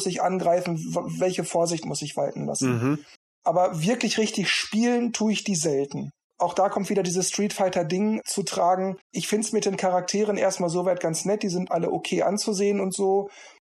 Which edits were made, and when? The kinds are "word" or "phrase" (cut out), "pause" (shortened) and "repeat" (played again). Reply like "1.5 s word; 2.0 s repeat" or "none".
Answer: 3.2 s pause; 6.3 s pause; 9.0 s pause